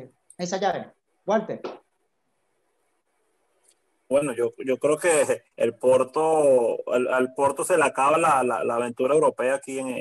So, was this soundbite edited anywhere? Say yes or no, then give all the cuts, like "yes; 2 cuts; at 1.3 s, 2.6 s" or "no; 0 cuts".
yes; 1 cut; at 5.5 s